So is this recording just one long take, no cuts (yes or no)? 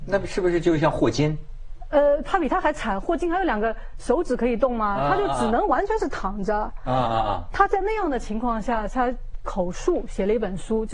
yes